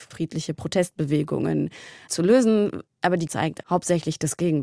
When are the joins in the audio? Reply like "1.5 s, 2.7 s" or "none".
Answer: 2.1 s, 3.3 s, 3.6 s